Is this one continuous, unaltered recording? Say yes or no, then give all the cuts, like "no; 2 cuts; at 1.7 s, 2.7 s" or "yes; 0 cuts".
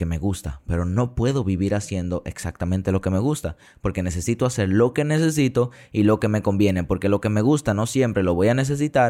yes; 0 cuts